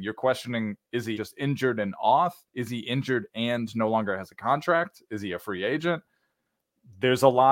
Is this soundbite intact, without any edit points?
no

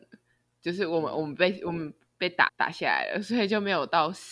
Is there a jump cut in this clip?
yes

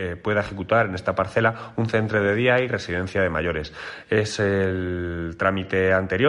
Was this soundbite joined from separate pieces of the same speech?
no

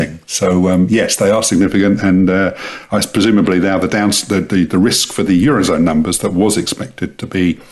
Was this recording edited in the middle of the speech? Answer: no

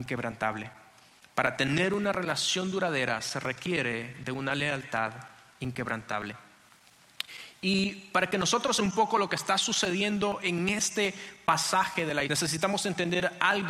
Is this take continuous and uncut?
no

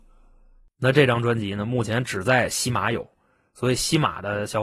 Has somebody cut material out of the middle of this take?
no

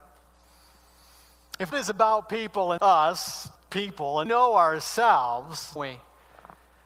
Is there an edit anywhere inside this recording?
yes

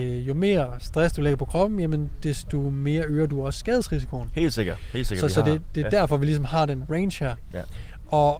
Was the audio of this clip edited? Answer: no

